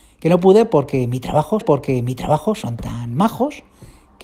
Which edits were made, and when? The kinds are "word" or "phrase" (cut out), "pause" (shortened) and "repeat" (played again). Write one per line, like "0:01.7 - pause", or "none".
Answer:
0:01.6 - repeat